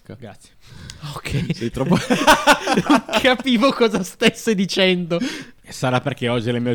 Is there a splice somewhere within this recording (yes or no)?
no